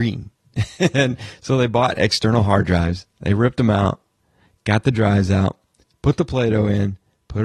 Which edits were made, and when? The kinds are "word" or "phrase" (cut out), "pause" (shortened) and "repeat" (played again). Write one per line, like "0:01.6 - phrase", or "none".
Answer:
none

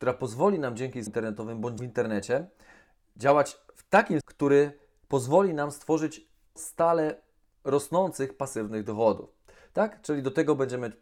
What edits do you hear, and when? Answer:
0:01.1 - word
0:01.8 - word
0:04.2 - word
0:06.6 - word

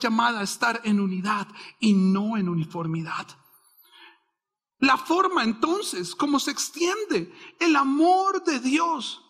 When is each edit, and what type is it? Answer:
none

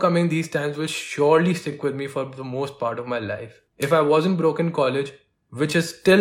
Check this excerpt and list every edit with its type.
0:03.7 - pause

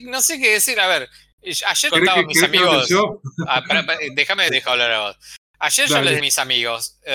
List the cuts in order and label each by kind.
0:01.9 - phrase
0:04.5 - phrase
0:06.2 - phrase

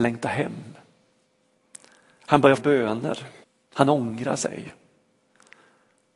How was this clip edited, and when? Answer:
0:02.6 - word
0:03.4 - pause

